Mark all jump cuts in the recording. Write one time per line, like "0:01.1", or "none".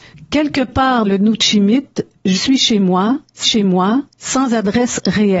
0:01.0
0:02.3
0:03.4